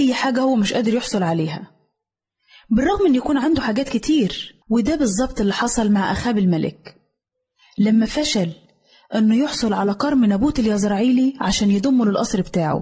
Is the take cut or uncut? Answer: cut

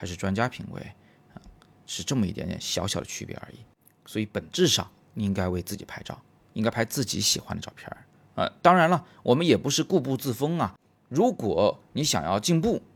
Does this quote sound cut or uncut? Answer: uncut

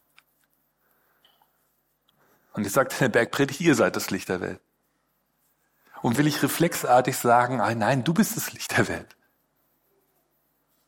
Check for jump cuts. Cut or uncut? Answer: cut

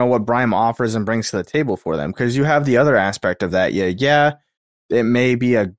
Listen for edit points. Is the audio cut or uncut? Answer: uncut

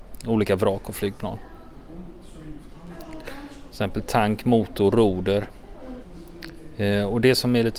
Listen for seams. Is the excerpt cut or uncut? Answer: uncut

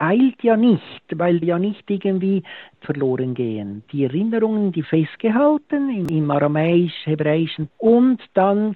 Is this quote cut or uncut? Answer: cut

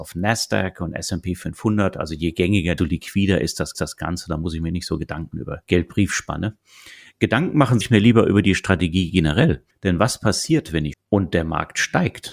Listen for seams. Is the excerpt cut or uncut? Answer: cut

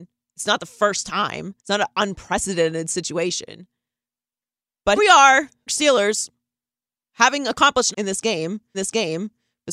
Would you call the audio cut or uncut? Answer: cut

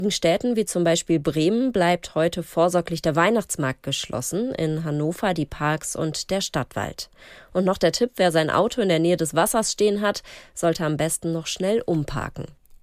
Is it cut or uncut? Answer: uncut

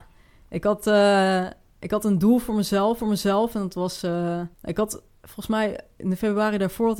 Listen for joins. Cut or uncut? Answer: cut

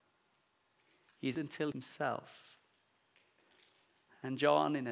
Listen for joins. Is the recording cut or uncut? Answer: cut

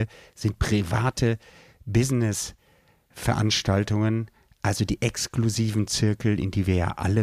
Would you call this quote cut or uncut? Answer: uncut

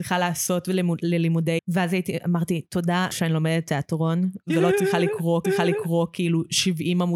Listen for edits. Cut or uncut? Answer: cut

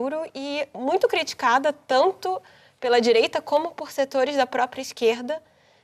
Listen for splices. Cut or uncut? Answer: uncut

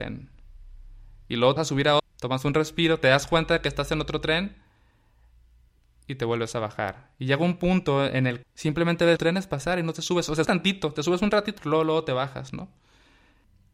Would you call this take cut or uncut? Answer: cut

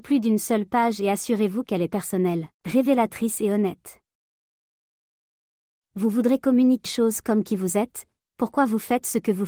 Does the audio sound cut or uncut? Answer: cut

